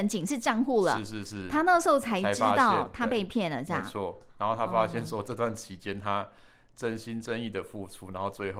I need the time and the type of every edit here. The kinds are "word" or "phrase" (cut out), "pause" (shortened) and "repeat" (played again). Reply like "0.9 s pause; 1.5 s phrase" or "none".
4.3 s pause